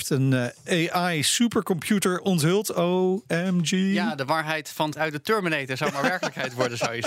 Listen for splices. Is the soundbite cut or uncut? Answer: cut